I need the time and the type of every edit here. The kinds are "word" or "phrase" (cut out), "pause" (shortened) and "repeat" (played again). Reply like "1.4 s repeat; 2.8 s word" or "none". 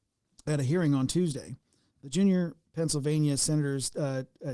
none

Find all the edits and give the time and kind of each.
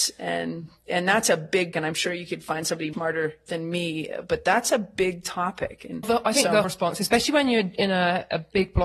1.7 s word; 2.9 s word; 6.0 s word; 6.6 s word

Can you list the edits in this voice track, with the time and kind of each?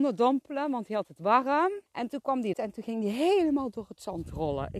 1.9 s pause; 2.5 s word

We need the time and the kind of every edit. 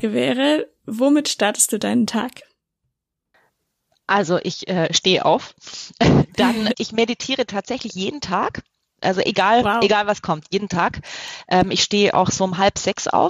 6.7 s word

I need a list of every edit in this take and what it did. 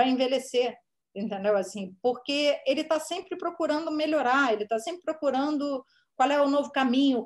none

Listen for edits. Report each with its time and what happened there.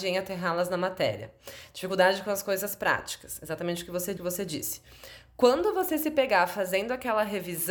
4.2 s repeat

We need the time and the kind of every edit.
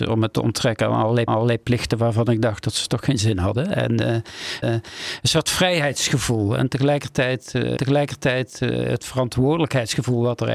1.3 s repeat; 4.6 s repeat; 7.8 s repeat

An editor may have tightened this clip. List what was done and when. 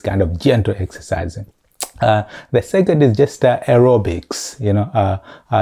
none

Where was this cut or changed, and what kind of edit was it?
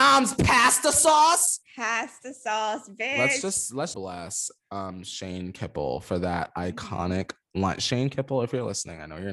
3.9 s phrase

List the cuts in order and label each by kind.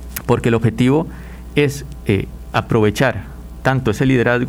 none

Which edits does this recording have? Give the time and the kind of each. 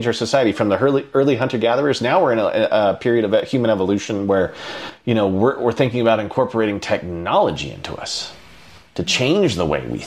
none

